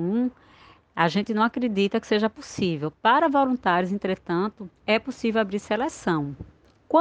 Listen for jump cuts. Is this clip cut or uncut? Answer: cut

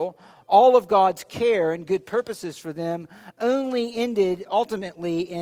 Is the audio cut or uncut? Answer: uncut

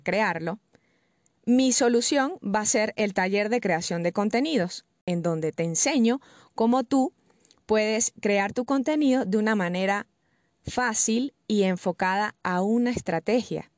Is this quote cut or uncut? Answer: uncut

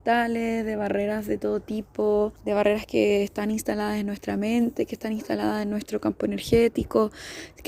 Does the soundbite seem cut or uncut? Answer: cut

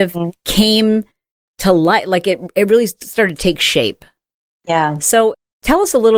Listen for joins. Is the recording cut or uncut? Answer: uncut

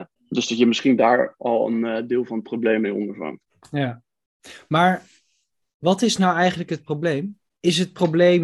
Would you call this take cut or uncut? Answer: uncut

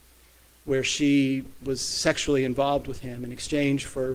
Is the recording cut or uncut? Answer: uncut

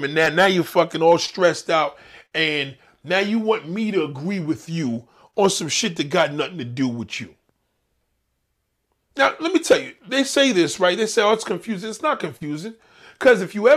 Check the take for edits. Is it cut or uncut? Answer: uncut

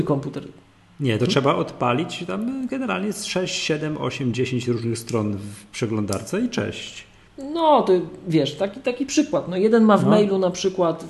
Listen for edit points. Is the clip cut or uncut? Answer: cut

